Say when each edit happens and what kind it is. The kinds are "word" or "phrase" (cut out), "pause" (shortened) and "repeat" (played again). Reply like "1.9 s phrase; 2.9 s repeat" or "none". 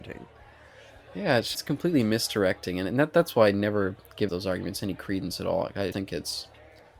1.5 s word; 4.3 s word; 5.9 s word